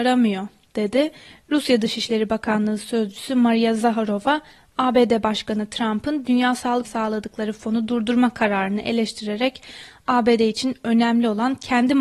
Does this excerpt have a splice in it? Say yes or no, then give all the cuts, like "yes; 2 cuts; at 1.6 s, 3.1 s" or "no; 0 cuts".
yes; 1 cut; at 6.8 s